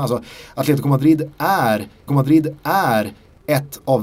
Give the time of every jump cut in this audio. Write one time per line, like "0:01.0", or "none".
0:02.1